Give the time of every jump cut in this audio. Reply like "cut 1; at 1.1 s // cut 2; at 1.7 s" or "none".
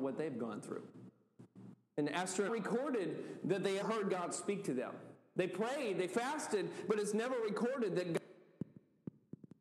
cut 1; at 2.5 s // cut 2; at 3.8 s